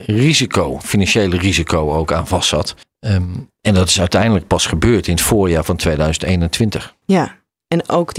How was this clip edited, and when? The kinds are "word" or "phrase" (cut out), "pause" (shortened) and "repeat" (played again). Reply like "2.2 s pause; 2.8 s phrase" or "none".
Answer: 2.8 s pause; 7.0 s pause